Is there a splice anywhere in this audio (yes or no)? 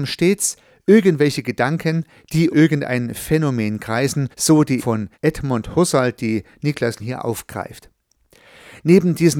yes